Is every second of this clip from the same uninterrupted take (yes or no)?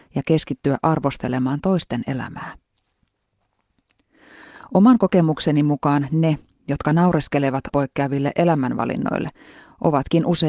no